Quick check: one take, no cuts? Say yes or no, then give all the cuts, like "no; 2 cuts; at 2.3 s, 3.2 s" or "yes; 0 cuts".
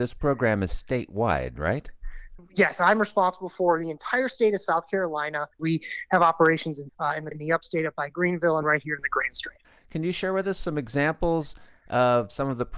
no; 5 cuts; at 5.5 s, 6.9 s, 7.3 s, 8.6 s, 9.6 s